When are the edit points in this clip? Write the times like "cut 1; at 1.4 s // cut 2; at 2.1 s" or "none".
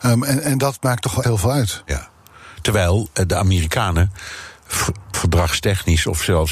cut 1; at 1.2 s // cut 2; at 5.1 s